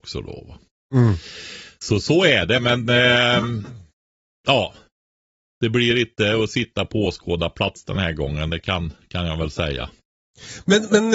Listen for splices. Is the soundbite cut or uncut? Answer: uncut